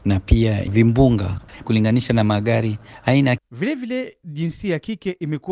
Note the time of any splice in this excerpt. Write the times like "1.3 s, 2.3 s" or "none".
1.6 s, 3.4 s

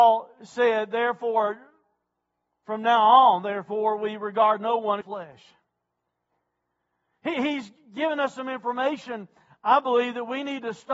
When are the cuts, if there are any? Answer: 5.0 s

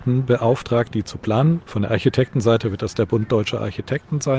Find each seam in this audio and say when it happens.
none

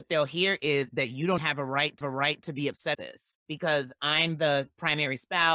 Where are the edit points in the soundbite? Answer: 1.4 s, 2.0 s, 2.9 s, 3.4 s

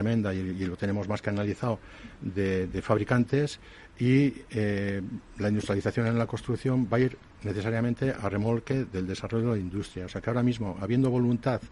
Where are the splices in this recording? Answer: none

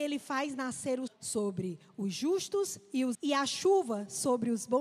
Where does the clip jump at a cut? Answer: 1.1 s, 3.1 s

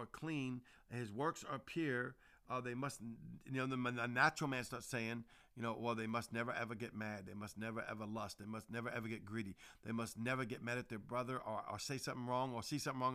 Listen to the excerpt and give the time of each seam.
none

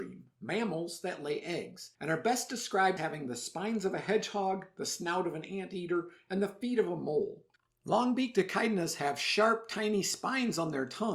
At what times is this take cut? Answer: 1.9 s, 3.0 s, 7.5 s

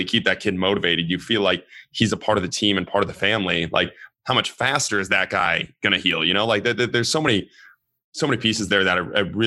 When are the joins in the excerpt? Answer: none

